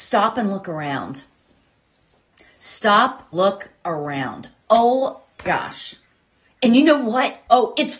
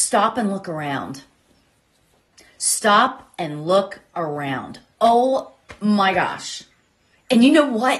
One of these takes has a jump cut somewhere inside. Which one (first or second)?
first